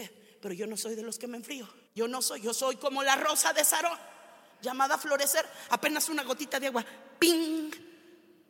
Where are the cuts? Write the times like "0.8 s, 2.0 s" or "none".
1.9 s, 4.5 s